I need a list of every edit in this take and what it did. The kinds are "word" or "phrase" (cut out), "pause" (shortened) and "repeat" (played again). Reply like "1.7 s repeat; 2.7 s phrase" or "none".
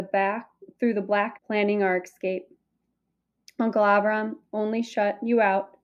1.4 s word